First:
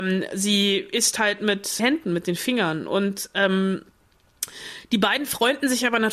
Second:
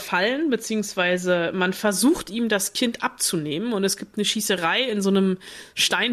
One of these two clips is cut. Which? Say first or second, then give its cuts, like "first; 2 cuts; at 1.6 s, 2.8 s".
first; 1 cut; at 1.8 s